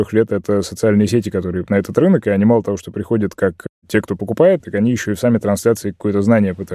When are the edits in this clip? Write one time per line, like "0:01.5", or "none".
0:01.7
0:04.6